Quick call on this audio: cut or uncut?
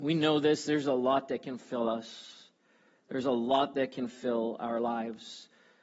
uncut